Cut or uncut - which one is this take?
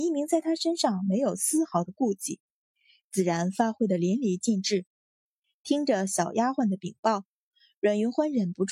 uncut